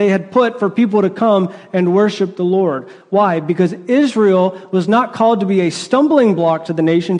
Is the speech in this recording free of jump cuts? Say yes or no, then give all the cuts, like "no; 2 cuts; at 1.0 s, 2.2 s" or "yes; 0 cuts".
yes; 0 cuts